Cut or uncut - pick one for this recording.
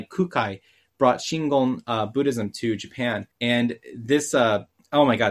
cut